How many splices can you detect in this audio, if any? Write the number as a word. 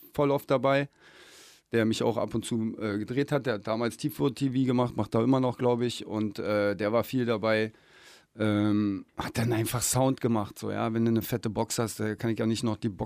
zero